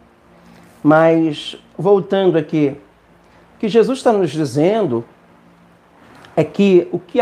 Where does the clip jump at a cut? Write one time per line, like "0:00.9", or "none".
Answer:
none